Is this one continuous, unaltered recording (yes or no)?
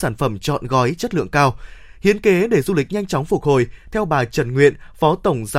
yes